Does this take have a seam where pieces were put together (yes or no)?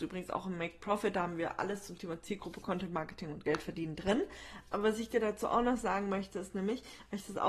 no